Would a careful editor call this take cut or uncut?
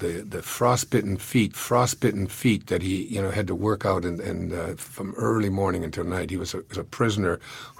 cut